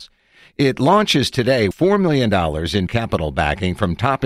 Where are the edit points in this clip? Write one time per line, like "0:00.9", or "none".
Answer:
0:01.7
0:02.9